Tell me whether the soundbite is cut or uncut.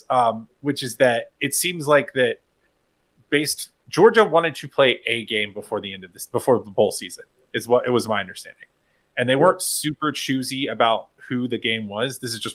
uncut